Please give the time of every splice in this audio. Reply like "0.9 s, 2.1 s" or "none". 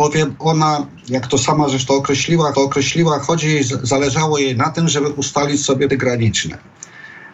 2.5 s, 5.9 s